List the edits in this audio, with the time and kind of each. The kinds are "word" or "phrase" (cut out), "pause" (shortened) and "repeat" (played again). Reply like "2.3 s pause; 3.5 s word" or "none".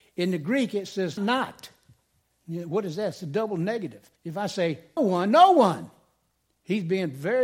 1.2 s word; 4.2 s pause; 5.0 s word